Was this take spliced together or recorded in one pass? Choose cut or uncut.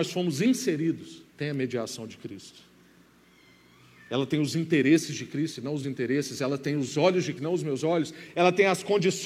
cut